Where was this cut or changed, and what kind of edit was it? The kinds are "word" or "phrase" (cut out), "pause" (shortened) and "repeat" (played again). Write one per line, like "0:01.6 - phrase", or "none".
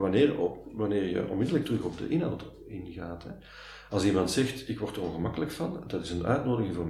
none